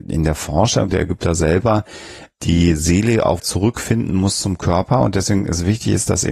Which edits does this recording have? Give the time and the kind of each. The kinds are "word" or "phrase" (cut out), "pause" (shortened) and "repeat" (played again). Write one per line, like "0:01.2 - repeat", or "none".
0:03.4 - word